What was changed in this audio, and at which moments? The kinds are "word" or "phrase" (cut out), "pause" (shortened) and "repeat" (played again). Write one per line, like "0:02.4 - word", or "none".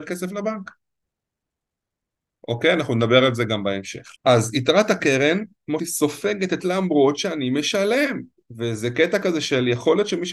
0:04.2 - pause
0:05.8 - word
0:06.6 - phrase